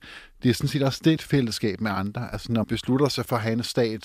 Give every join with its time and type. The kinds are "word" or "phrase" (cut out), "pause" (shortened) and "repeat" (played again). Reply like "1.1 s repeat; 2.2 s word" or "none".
1.2 s phrase; 2.6 s word